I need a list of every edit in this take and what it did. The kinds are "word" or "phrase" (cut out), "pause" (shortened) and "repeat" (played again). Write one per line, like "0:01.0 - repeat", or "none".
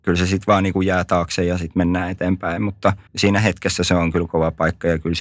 0:03.1 - pause